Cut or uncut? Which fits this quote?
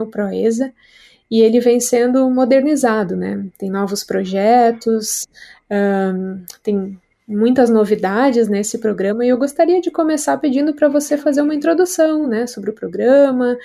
uncut